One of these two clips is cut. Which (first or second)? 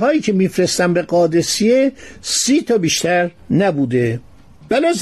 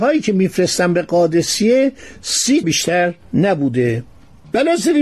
second